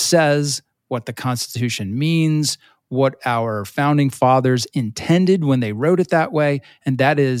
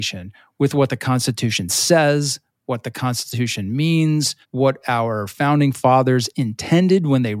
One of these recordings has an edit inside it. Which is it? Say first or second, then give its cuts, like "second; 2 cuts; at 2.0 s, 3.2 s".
second; 1 cut; at 4.4 s